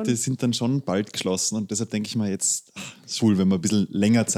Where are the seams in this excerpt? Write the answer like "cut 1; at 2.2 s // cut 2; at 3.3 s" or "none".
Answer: cut 1; at 3.2 s